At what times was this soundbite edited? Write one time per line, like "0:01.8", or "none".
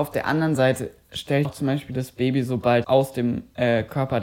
0:01.4
0:02.8